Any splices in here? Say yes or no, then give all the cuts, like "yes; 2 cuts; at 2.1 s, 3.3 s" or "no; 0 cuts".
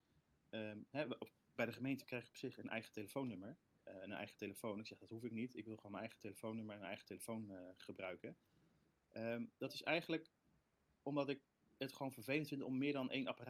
no; 0 cuts